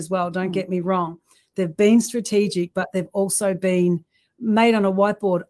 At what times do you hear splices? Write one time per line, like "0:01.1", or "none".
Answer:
none